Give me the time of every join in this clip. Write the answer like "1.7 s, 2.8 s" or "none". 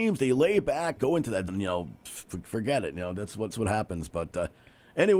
1.0 s, 1.5 s, 3.5 s